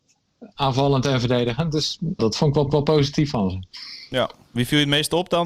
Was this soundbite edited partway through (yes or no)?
yes